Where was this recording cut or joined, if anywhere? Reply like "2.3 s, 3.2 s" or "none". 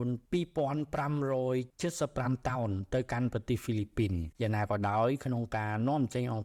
4.3 s